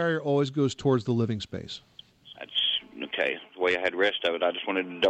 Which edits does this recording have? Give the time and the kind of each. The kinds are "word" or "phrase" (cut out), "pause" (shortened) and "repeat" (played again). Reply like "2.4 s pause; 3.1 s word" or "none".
none